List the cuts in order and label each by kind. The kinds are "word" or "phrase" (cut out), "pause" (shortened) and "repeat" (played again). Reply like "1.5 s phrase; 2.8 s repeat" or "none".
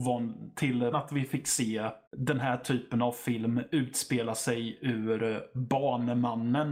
0.9 s word; 2.1 s pause

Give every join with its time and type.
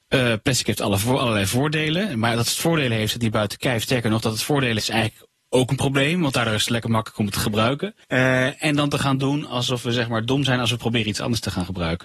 4.8 s word; 8.0 s pause

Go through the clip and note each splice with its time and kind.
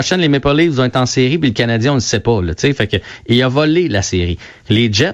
none

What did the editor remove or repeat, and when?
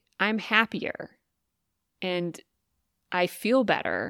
none

